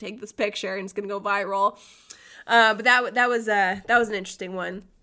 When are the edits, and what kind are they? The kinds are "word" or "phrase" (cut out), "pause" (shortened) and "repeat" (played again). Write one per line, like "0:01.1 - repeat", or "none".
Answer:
none